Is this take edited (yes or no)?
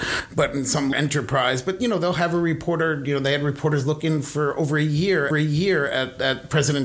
yes